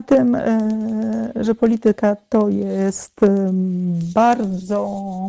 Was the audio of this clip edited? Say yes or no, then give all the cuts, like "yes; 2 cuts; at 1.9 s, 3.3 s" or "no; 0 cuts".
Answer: no; 0 cuts